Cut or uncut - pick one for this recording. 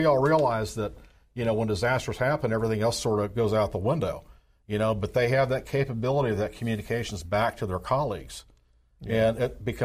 uncut